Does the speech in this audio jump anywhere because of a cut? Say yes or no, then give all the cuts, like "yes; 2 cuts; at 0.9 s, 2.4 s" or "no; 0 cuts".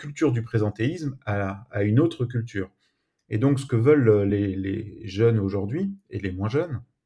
no; 0 cuts